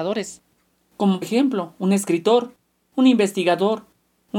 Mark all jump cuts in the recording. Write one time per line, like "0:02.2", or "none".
0:01.2